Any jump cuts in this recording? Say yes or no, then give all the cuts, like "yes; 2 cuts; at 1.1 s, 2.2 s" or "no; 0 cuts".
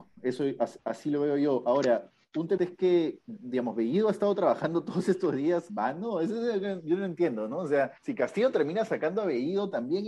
yes; 4 cuts; at 2.6 s, 3.2 s, 5.7 s, 8.0 s